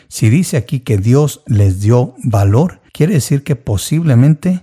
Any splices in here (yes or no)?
yes